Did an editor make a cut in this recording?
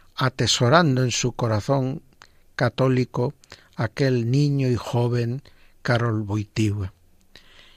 no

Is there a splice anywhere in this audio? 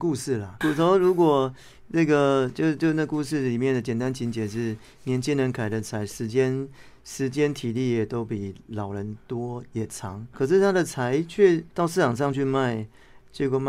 yes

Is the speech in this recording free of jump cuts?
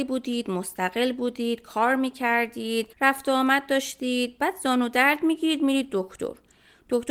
no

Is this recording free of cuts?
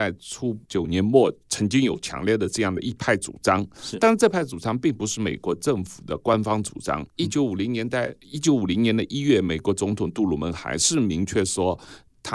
no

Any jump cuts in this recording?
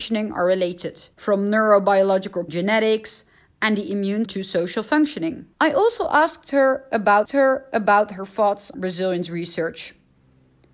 yes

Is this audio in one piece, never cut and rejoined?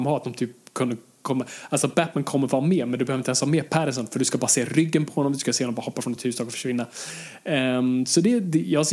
yes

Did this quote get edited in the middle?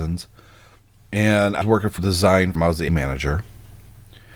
yes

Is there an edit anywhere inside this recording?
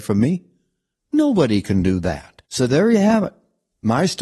yes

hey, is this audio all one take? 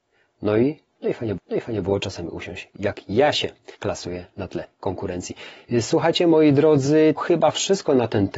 no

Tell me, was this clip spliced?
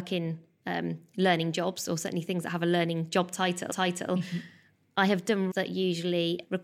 yes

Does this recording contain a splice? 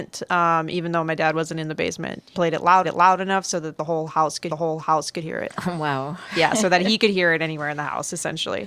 yes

